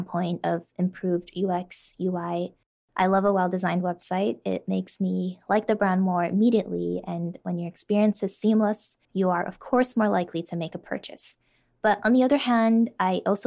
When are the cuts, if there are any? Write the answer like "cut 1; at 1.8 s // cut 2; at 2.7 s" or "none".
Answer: cut 1; at 9.0 s